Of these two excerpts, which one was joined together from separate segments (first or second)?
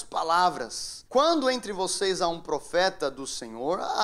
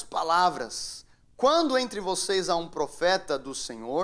first